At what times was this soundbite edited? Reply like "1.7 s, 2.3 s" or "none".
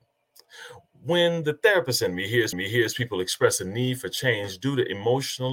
2.5 s